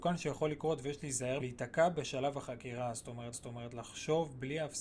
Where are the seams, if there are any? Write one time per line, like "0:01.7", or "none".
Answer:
0:01.4
0:03.3